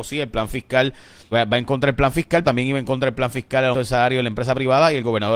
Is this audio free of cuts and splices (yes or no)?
no